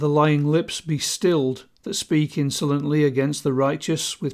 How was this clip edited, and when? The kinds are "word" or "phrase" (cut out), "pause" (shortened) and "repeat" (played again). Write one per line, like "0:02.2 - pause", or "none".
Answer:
none